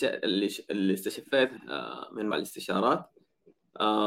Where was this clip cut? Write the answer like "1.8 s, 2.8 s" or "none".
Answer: 1.6 s, 2.3 s